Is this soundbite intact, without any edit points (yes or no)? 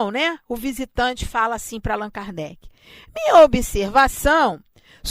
yes